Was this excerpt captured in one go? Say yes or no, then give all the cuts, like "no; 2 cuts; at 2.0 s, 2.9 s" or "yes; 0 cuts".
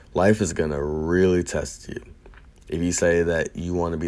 yes; 0 cuts